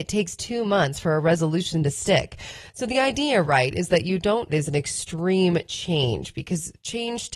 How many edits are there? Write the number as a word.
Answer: one